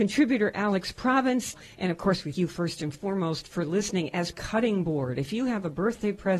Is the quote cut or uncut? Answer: cut